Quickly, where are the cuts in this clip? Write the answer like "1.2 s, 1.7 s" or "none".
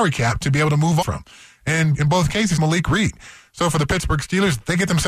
1.0 s, 1.9 s, 2.6 s